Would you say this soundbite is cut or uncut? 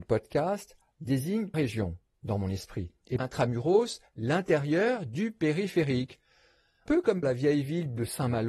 cut